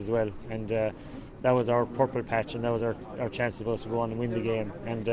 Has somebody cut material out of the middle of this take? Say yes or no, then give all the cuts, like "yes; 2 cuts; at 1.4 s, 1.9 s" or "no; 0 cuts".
no; 0 cuts